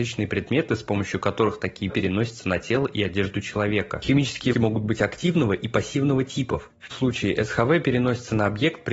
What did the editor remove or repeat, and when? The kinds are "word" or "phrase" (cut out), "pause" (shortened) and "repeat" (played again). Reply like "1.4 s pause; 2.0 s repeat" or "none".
1.9 s word; 4.5 s word; 6.9 s word